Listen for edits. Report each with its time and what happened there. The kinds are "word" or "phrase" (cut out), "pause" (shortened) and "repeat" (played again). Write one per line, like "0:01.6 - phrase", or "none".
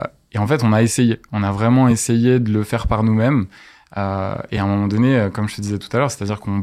none